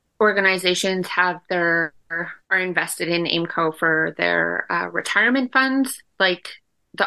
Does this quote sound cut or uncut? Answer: cut